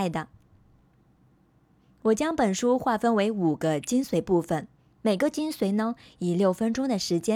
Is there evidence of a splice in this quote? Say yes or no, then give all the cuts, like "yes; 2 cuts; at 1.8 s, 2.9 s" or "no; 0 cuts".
no; 0 cuts